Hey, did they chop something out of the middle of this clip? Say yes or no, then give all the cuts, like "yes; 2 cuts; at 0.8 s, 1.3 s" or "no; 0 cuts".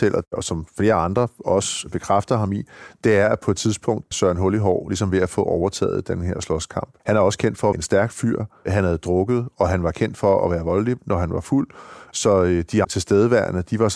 yes; 3 cuts; at 4.1 s, 7.7 s, 12.8 s